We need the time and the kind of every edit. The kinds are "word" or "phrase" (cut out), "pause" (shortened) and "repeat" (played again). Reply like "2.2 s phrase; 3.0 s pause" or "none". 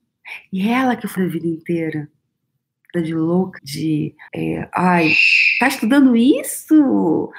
1.2 s word; 2.9 s phrase; 3.6 s phrase; 4.3 s pause